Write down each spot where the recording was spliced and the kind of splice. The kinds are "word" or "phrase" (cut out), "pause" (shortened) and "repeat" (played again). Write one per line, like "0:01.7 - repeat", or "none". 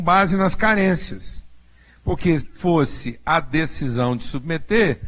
0:02.4 - word